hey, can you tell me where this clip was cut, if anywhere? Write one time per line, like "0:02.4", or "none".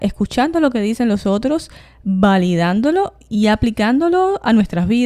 none